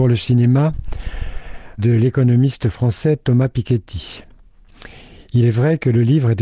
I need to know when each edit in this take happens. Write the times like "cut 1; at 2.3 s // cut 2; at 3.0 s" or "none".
cut 1; at 1.8 s